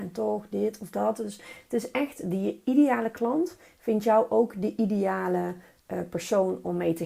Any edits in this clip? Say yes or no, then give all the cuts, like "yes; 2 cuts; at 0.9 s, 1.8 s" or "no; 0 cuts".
no; 0 cuts